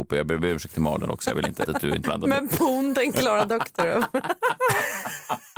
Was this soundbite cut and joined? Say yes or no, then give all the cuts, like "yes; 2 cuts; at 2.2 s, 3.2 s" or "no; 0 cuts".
yes; 2 cuts; at 1.6 s, 2.0 s